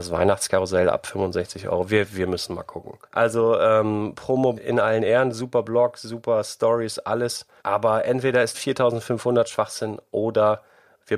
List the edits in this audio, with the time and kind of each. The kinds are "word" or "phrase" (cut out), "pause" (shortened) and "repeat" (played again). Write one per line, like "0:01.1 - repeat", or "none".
0:03.0 - pause
0:04.6 - word
0:07.6 - pause
0:08.5 - phrase